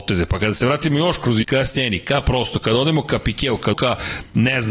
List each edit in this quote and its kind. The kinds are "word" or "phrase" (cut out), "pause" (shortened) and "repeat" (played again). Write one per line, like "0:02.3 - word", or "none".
0:01.4 - word
0:03.7 - word